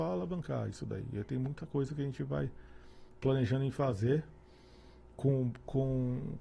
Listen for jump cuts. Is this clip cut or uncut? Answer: uncut